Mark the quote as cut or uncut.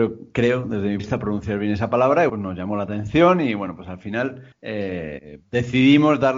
cut